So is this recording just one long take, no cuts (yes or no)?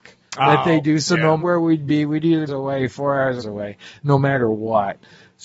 no